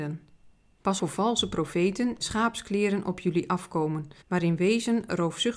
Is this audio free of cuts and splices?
no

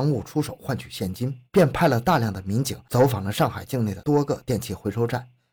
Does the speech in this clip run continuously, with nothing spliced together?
no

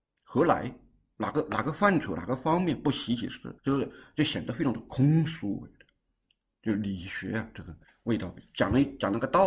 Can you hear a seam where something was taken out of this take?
yes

